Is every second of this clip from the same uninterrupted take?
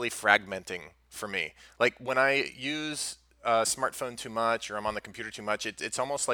yes; 0 cuts

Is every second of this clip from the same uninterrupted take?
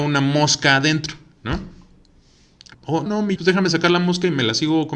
no; 3 cuts; at 2.7 s, 3.1 s, 3.4 s

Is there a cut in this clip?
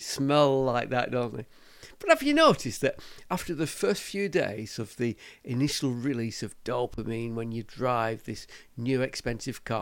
no; 0 cuts

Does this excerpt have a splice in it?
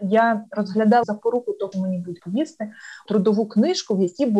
yes; 4 cuts; at 1.0 s, 1.7 s, 2.2 s, 3.1 s

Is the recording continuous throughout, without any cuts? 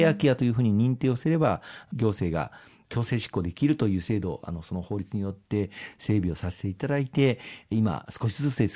yes; 0 cuts

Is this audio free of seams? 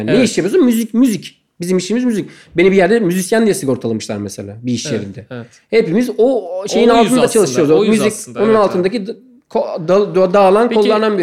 yes; 0 cuts

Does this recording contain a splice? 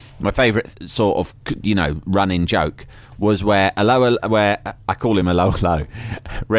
no; 0 cuts

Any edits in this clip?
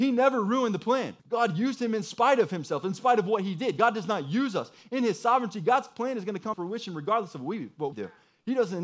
yes; 3 cuts; at 1.2 s, 6.5 s, 7.9 s

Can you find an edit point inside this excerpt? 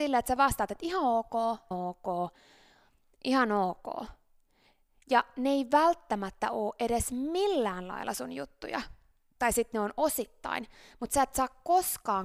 yes; 1 cut; at 1.7 s

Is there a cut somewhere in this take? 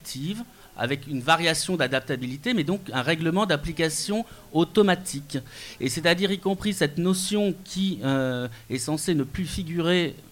no; 0 cuts

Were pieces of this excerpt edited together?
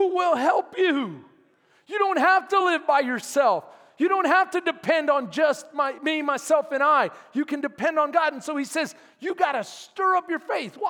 no; 0 cuts

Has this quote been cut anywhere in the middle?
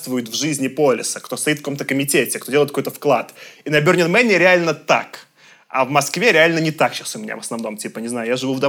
no; 0 cuts

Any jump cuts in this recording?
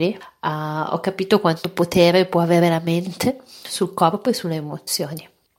no; 0 cuts

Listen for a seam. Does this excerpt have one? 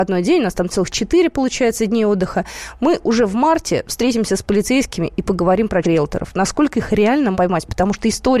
yes; 2 cuts; at 5.8 s, 7.3 s

